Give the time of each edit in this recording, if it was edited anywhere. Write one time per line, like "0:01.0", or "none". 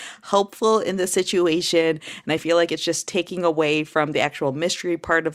none